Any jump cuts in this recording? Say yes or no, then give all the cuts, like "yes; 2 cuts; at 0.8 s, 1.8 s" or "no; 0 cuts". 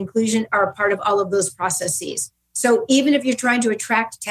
no; 0 cuts